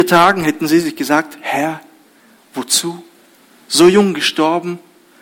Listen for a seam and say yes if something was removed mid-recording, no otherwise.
no